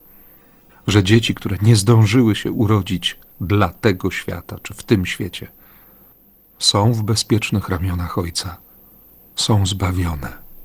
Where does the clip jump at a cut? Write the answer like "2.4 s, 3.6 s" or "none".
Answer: none